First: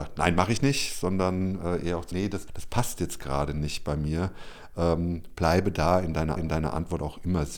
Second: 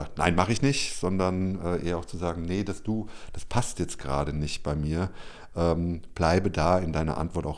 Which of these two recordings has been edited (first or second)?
first